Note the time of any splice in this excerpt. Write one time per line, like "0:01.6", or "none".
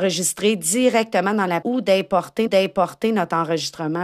0:01.6
0:02.5